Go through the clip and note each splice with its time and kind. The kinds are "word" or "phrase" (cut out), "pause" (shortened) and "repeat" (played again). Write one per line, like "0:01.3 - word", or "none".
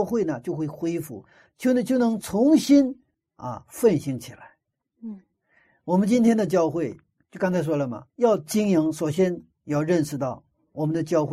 0:03.1 - pause
0:08.1 - pause